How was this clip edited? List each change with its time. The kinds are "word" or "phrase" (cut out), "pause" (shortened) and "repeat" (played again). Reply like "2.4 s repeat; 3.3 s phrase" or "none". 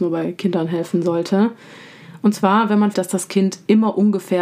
2.9 s word